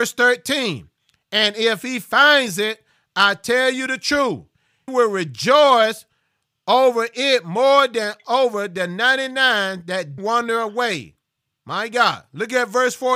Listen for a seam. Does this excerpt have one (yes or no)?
yes